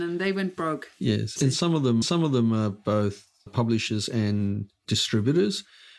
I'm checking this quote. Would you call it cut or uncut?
cut